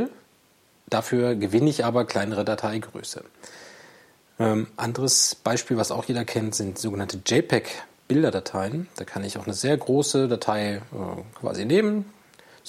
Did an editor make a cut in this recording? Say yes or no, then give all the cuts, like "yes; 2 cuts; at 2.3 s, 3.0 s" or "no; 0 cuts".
no; 0 cuts